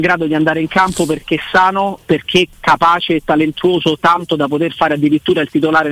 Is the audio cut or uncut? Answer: uncut